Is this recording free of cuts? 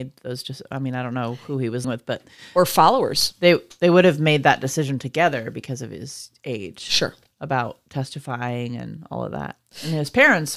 no; 1 cut; at 1.8 s

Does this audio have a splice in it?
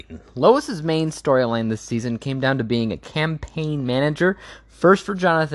no; 0 cuts

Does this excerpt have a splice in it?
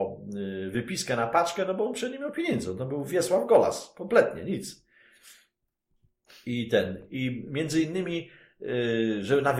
no; 0 cuts

